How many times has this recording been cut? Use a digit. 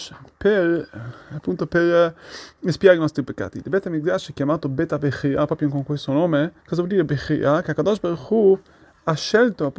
1